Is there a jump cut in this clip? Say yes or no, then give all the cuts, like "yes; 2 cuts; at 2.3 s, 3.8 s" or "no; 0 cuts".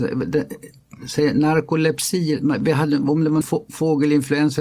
yes; 1 cut; at 3.4 s